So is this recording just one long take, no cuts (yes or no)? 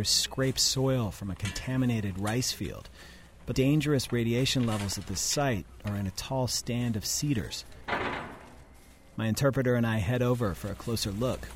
no